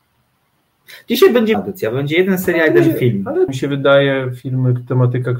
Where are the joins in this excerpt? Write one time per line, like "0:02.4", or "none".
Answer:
0:01.5
0:03.5